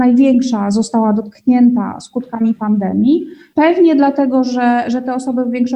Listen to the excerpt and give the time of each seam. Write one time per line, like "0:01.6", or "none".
none

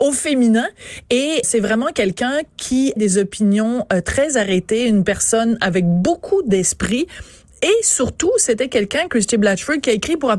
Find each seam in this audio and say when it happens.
0:01.4
0:03.0

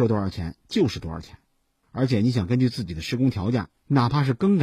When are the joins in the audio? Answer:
none

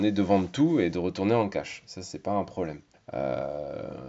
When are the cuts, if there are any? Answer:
0:02.9

